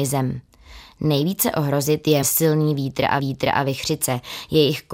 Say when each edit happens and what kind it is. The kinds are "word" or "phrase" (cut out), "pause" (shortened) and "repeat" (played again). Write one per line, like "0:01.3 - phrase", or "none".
0:02.2 - word
0:03.2 - repeat